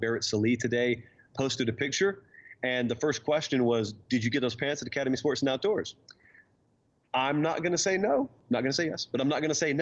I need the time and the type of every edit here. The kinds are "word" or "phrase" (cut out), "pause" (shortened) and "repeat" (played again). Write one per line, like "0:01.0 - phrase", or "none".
none